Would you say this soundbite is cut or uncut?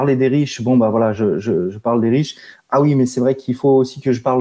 uncut